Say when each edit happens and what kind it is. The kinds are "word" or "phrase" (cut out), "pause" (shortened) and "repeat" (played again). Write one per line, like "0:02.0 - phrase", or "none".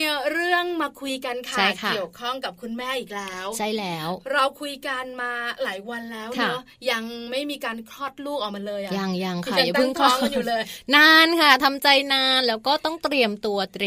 none